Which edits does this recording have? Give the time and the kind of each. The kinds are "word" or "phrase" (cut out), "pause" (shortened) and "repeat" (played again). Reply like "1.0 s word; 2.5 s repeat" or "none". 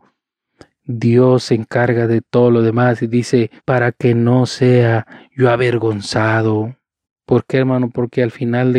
3.6 s pause; 7.0 s pause